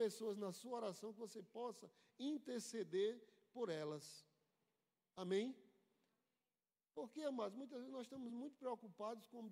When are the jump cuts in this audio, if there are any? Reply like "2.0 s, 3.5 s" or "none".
none